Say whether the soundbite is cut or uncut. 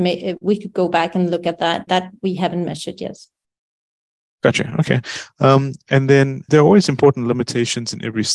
cut